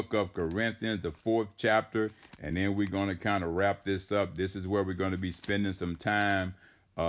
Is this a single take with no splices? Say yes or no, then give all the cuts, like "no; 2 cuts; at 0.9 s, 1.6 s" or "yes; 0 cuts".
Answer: yes; 0 cuts